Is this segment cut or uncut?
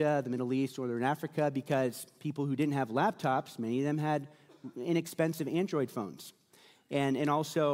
uncut